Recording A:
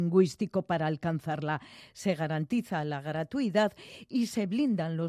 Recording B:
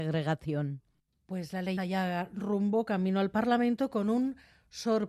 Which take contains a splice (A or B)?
B